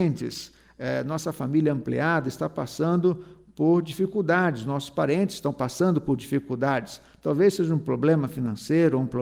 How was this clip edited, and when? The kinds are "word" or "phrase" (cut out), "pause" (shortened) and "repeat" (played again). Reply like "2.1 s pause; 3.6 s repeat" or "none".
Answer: none